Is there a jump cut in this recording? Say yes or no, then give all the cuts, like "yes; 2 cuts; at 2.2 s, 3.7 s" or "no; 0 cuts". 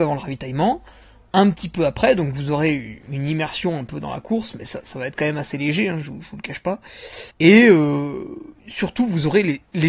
yes; 2 cuts; at 7.3 s, 8.6 s